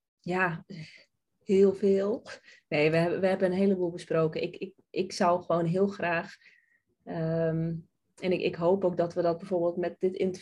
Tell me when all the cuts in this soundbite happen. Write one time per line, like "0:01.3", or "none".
none